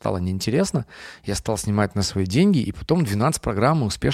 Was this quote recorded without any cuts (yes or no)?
yes